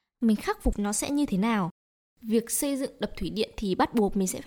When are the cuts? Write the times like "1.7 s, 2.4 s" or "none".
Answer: none